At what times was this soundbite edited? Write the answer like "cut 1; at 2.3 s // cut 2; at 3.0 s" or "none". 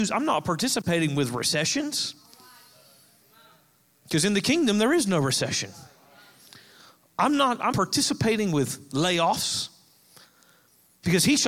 cut 1; at 7.7 s